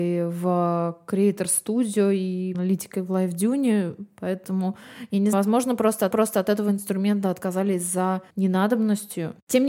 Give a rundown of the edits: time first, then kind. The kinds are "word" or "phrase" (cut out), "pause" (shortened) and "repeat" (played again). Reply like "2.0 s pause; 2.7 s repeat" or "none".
2.5 s word; 5.3 s word; 6.1 s repeat; 8.3 s pause